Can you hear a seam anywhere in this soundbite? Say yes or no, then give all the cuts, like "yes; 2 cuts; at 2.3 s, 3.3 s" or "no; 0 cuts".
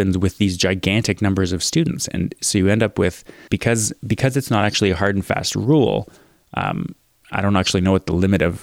yes; 1 cut; at 3.5 s